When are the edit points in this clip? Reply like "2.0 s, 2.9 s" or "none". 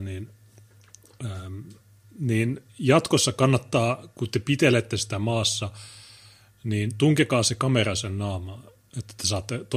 none